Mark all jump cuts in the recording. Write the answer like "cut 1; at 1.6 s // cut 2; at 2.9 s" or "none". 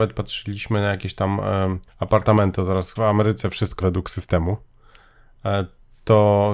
cut 1; at 1.9 s // cut 2; at 3.0 s // cut 3; at 3.8 s